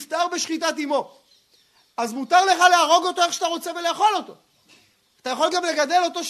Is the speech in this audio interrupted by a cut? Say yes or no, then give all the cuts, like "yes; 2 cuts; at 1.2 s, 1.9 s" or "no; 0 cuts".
no; 0 cuts